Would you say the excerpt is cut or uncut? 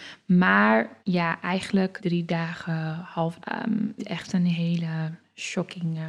cut